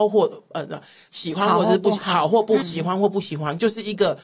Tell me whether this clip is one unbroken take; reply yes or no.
no